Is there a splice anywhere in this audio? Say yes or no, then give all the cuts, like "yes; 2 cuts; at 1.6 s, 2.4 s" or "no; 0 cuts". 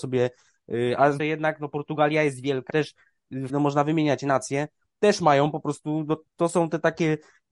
yes; 3 cuts; at 1.2 s, 2.7 s, 3.5 s